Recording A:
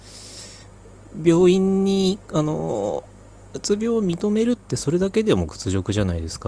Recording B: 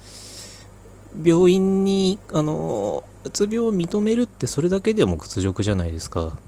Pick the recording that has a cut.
B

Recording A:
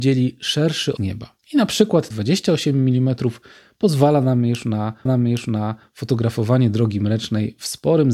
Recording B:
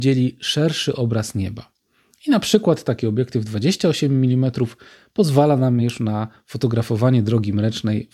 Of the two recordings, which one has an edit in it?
A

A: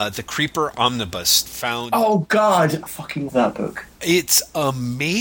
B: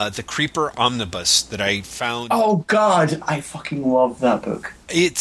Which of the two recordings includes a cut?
A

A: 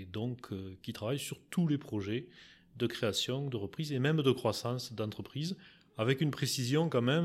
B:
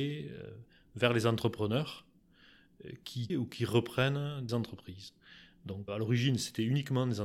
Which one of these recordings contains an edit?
B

